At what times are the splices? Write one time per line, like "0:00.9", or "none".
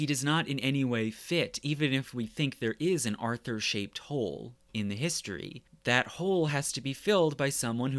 none